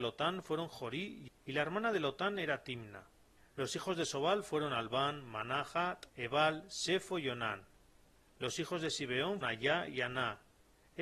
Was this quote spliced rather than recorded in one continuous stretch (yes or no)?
yes